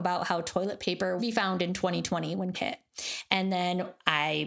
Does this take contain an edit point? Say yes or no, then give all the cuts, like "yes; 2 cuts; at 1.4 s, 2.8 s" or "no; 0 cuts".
yes; 2 cuts; at 1.2 s, 2.5 s